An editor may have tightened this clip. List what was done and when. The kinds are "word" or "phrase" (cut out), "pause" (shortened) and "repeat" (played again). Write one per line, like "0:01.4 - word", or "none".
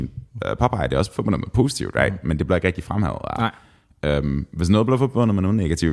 none

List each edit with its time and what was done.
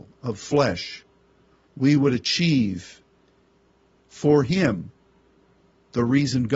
none

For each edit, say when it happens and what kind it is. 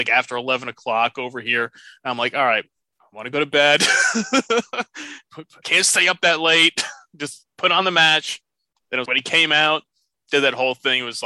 0:05.6 - phrase
0:09.1 - word

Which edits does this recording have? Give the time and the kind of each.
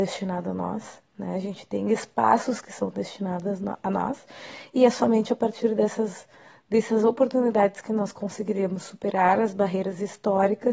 none

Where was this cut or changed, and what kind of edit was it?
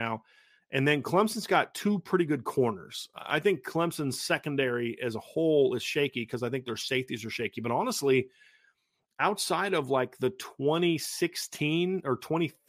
none

